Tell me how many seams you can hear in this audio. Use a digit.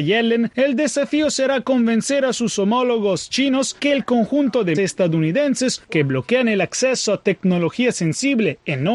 2